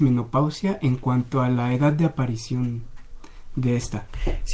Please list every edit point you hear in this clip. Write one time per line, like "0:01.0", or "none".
none